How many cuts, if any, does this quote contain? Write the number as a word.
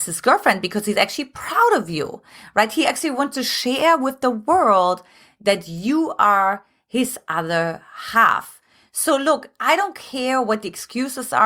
zero